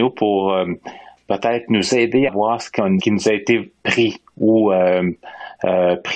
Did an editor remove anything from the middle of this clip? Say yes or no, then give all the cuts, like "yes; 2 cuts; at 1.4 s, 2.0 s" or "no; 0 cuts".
yes; 3 cuts; at 2.3 s, 3.0 s, 3.8 s